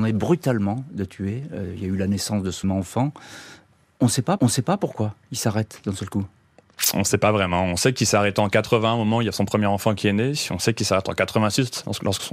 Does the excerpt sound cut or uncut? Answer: cut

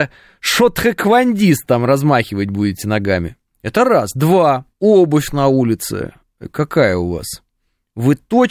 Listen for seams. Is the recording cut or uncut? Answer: cut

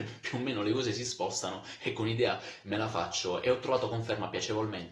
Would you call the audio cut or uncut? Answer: uncut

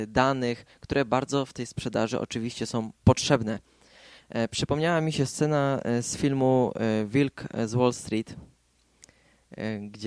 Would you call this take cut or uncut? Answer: uncut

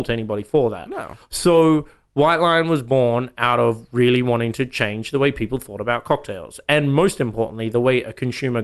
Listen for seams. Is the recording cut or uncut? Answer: uncut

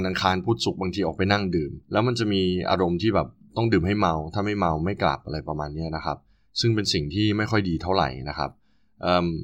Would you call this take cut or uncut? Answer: cut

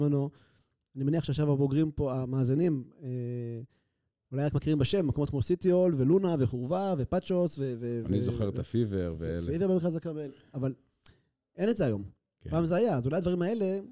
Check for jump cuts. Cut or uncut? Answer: uncut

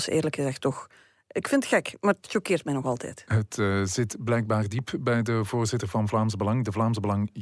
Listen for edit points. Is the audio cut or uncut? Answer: uncut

